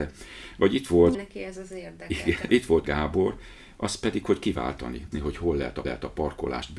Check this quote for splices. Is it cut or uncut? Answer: cut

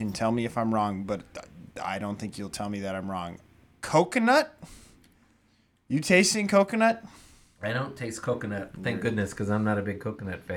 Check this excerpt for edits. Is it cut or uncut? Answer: uncut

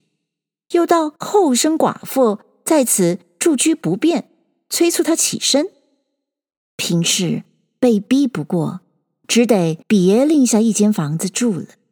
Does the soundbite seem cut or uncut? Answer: cut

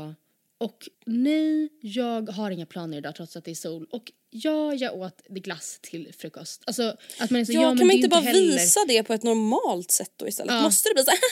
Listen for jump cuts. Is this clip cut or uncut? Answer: cut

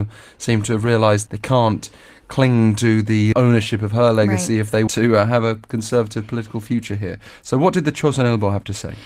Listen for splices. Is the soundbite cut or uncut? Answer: cut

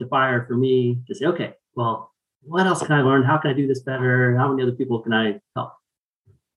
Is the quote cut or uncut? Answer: uncut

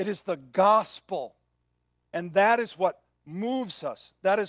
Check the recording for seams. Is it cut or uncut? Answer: uncut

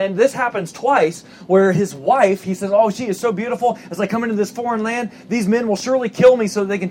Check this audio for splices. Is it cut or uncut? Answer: uncut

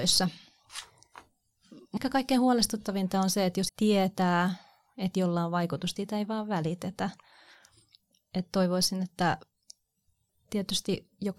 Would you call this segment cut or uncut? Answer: cut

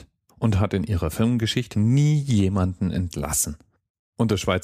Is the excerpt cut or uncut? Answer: cut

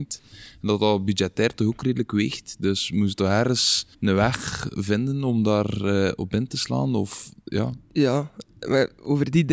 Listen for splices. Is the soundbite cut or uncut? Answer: cut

